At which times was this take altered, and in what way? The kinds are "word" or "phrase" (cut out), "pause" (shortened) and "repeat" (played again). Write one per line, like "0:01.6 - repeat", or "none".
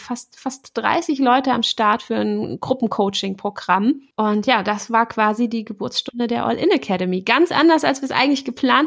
0:04.1 - pause